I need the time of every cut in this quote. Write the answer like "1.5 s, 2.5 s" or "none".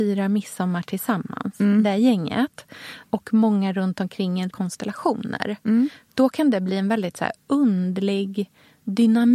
4.5 s